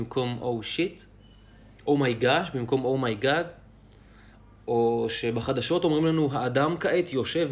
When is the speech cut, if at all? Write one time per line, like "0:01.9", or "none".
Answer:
none